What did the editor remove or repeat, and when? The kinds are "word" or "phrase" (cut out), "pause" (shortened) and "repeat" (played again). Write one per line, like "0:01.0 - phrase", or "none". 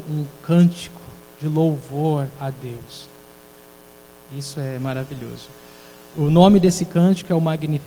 none